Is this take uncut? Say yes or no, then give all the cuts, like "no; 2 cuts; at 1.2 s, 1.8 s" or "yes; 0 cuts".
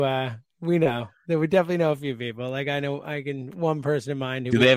yes; 0 cuts